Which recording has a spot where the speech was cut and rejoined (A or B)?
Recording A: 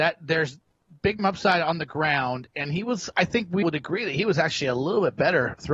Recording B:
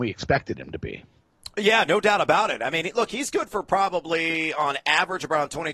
A